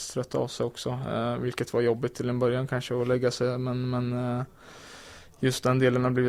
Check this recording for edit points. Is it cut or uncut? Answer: uncut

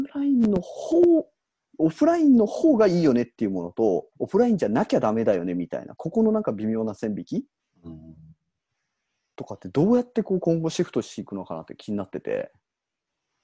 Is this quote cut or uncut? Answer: cut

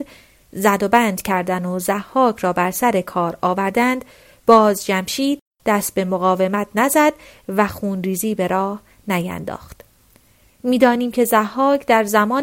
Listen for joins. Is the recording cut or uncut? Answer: uncut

